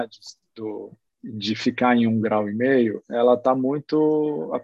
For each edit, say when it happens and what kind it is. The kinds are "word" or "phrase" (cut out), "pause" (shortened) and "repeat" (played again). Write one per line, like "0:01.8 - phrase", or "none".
0:01.1 - pause

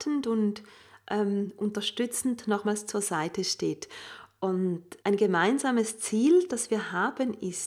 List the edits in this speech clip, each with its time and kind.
0:05.0 - pause

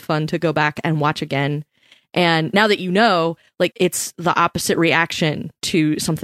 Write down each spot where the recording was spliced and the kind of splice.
0:03.7 - word

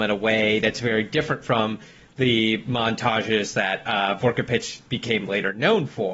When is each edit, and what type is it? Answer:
none

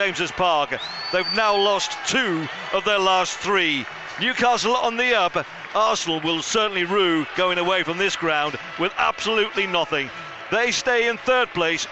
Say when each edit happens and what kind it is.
none

